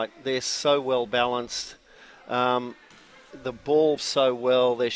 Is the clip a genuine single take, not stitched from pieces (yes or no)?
no